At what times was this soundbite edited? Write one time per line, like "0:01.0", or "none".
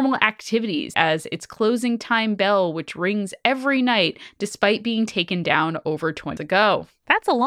0:00.9
0:06.4

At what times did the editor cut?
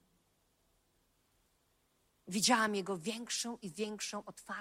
none

